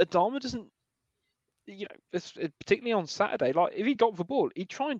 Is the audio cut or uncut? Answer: uncut